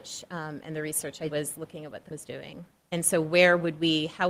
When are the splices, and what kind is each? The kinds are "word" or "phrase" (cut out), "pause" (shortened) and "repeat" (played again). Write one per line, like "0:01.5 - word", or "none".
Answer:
0:01.3 - word
0:02.1 - word